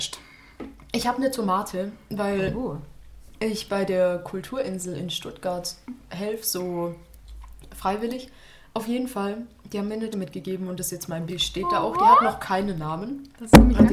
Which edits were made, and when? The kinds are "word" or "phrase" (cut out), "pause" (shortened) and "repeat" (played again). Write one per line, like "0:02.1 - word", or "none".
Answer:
0:10.1 - word
0:11.3 - word